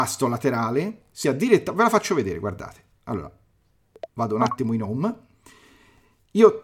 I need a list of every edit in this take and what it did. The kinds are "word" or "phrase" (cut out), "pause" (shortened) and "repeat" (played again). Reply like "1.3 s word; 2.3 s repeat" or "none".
1.2 s word; 4.1 s pause